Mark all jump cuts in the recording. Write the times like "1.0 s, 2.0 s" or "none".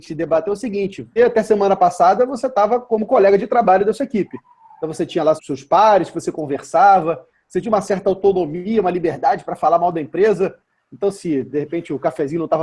1.2 s, 5.4 s